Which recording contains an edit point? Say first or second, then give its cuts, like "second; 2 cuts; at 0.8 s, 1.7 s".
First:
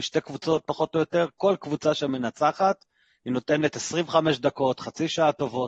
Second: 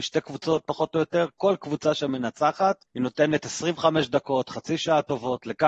second; 1 cut; at 2.9 s